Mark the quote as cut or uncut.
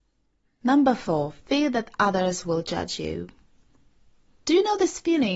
uncut